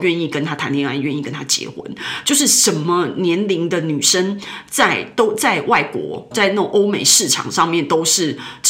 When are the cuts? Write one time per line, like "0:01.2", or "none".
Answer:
0:06.3

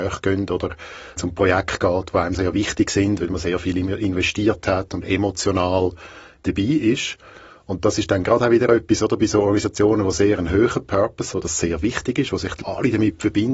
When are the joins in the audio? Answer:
0:01.2
0:02.3
0:05.0
0:11.3
0:12.6

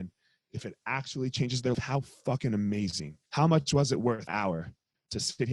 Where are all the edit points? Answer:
0:01.7
0:03.3
0:04.3

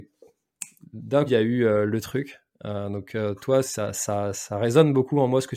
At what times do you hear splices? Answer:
0:01.3
0:03.6

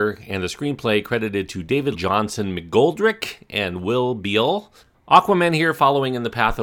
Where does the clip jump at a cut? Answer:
0:01.9
0:04.8

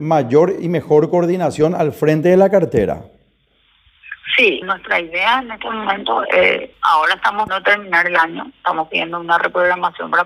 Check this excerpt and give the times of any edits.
0:04.6
0:06.2
0:06.7
0:07.5

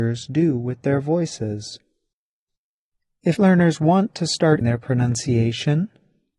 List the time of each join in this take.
0:03.4
0:04.6

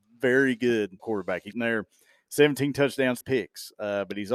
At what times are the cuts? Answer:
0:01.0
0:01.5
0:03.2

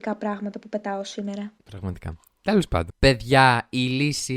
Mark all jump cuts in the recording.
0:01.6

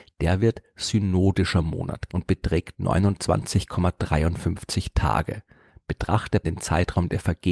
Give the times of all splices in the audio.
0:02.1
0:06.4

